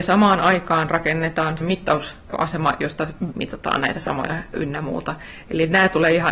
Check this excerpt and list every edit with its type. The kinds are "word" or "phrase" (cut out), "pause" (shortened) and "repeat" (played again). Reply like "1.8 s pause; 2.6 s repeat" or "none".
1.6 s word; 3.3 s word; 4.5 s word

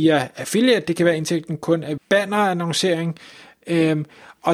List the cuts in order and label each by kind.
2.0 s word

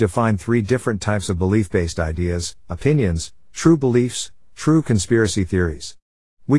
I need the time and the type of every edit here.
none

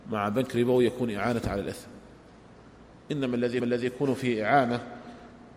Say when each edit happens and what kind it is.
3.6 s repeat

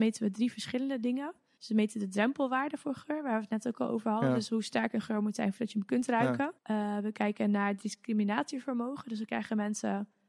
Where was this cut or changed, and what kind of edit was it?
1.6 s pause; 6.6 s pause

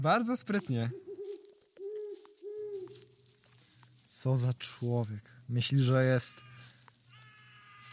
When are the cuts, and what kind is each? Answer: none

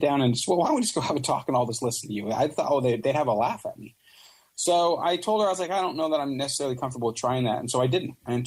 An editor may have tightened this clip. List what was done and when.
none

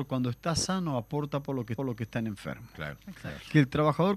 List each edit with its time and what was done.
1.8 s repeat

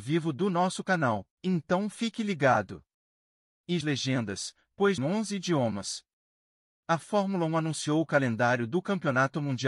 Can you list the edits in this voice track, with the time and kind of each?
1.3 s pause; 3.8 s phrase; 5.0 s phrase

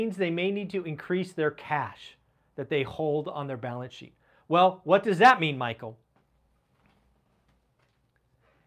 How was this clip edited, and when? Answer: none

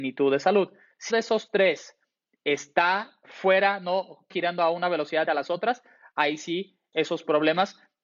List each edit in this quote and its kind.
1.1 s word; 3.2 s word; 4.3 s word; 5.2 s word; 6.9 s word

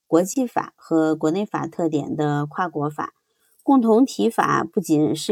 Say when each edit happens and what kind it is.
none

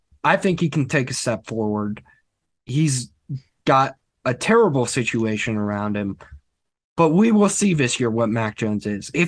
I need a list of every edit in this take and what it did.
none

